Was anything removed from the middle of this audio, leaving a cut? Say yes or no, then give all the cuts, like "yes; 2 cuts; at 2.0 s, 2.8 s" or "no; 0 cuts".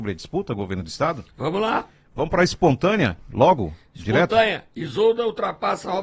no; 0 cuts